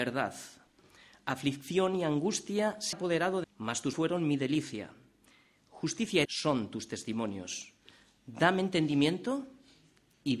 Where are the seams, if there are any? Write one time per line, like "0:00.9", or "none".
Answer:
0:02.9
0:03.4
0:03.9
0:06.2